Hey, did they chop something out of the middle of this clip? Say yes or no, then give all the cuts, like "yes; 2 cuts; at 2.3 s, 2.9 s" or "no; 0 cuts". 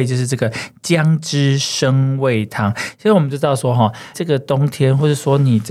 yes; 1 cut; at 4.1 s